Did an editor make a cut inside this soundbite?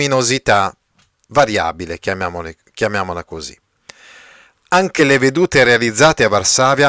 no; 0 cuts

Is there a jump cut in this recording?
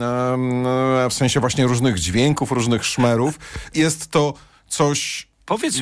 no; 0 cuts

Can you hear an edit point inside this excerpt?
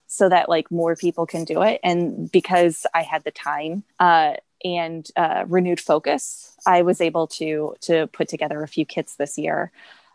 yes; 1 cut; at 3.9 s

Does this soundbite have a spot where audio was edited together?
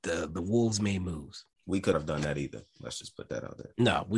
yes; 2 cuts; at 1.5 s, 1.9 s

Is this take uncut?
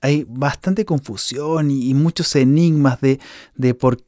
yes; 0 cuts

